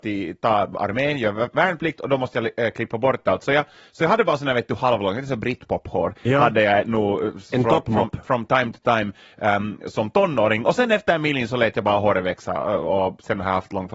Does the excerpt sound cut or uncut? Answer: uncut